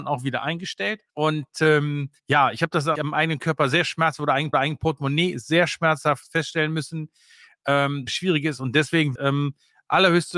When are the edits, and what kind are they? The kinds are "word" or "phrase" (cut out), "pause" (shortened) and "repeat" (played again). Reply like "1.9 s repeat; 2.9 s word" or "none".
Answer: 1.1 s pause; 2.2 s pause; 3.0 s word; 4.5 s repeat; 8.1 s phrase; 9.1 s word